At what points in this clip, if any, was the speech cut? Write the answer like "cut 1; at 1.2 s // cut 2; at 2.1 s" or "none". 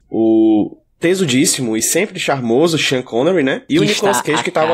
none

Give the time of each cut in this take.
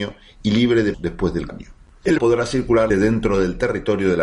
cut 1; at 0.9 s // cut 2; at 1.5 s // cut 3; at 2.2 s // cut 4; at 2.9 s

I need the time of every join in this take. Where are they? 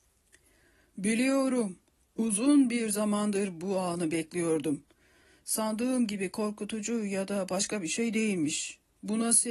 none

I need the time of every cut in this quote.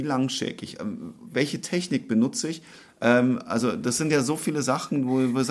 none

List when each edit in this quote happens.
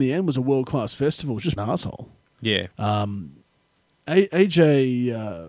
cut 1; at 1.6 s // cut 2; at 2.7 s

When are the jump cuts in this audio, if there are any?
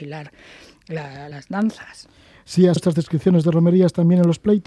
cut 1; at 1.3 s // cut 2; at 2.8 s

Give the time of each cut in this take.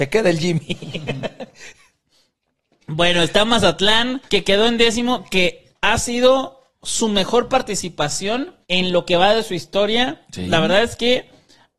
cut 1; at 4.3 s // cut 2; at 5.7 s // cut 3; at 6.7 s // cut 4; at 8.6 s

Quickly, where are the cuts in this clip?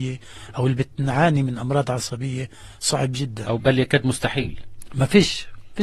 cut 1; at 3.6 s

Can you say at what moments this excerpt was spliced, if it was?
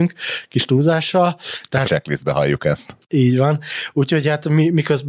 cut 1; at 1.8 s

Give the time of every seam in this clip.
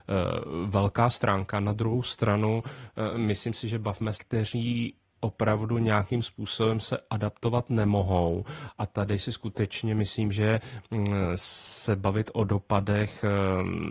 cut 1; at 4.1 s

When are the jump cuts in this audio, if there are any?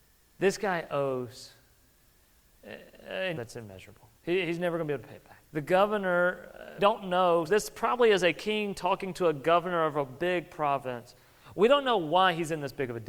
cut 1; at 3.3 s // cut 2; at 4.2 s // cut 3; at 5.4 s // cut 4; at 6.8 s // cut 5; at 7.5 s

